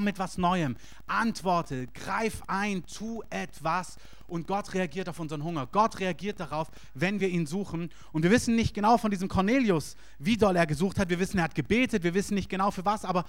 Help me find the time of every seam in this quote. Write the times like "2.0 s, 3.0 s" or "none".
none